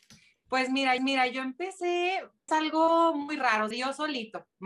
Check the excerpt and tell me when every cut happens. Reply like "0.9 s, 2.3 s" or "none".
1.0 s, 2.5 s, 3.7 s